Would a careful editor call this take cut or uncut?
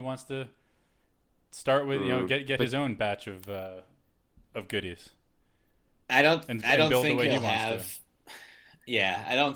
uncut